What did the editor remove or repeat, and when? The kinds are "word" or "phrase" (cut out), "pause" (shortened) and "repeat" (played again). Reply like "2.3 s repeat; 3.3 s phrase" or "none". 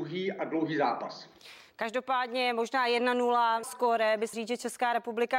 3.6 s word; 4.3 s word